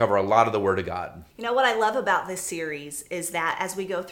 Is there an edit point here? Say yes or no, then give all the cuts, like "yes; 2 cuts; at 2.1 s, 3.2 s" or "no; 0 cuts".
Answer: yes; 1 cut; at 1.3 s